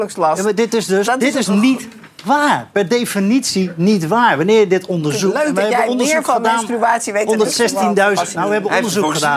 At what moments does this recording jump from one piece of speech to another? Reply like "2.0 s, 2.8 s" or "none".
1.0 s, 1.5 s